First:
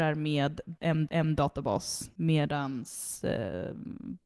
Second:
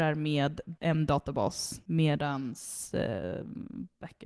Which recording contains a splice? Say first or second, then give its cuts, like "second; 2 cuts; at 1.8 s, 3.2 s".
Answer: first; 1 cut; at 1.1 s